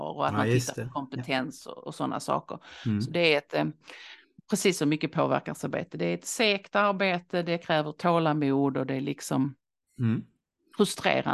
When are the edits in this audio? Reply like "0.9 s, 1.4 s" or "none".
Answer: none